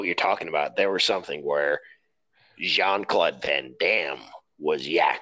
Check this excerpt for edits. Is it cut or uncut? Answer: uncut